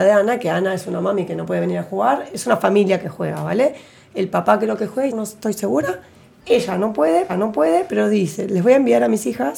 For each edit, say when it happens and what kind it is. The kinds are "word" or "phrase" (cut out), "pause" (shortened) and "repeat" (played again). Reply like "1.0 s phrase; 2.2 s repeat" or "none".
5.1 s word; 7.3 s repeat